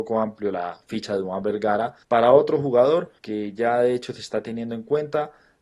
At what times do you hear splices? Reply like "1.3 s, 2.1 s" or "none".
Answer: 2.0 s, 3.2 s